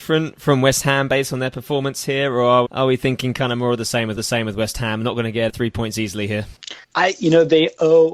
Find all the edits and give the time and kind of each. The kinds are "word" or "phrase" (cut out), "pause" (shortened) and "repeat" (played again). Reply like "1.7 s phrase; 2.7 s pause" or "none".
2.6 s word; 4.2 s repeat; 5.5 s word; 6.8 s pause